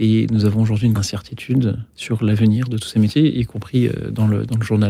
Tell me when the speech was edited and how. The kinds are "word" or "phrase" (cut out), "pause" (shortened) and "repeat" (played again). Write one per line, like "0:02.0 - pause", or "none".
0:00.9 - word
0:01.9 - pause